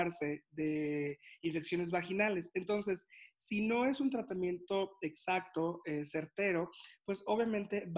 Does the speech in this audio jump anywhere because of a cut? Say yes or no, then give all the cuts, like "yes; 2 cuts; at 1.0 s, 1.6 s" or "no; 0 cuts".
no; 0 cuts